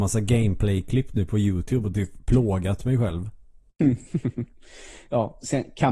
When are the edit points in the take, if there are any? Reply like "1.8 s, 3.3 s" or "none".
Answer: none

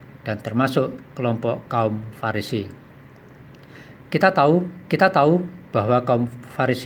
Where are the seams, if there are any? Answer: 4.9 s

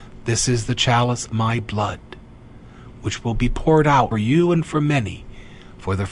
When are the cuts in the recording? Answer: 1.3 s, 4.1 s

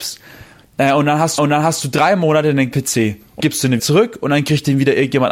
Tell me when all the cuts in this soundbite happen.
1.4 s, 2.7 s, 3.4 s, 3.8 s

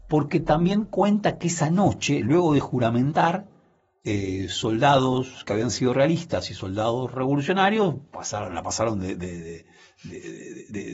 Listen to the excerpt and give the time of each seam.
8.1 s

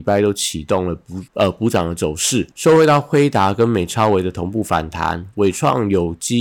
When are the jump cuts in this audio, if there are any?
1.3 s, 2.5 s

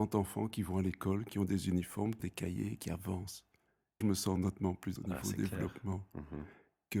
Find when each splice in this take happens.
2.2 s, 4.0 s, 5.0 s

